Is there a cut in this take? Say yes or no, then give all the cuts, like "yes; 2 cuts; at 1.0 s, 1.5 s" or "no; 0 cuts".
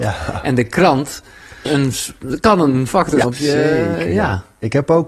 yes; 3 cuts; at 1.7 s, 2.9 s, 3.2 s